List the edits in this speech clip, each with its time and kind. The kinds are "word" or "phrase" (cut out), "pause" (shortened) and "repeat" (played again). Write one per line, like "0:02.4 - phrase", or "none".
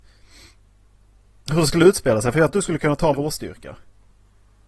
0:02.5 - word
0:03.1 - word